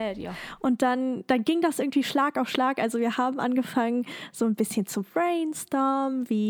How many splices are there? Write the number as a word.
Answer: zero